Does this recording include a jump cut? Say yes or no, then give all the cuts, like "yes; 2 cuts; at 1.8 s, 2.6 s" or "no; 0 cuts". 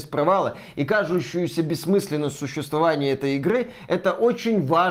no; 0 cuts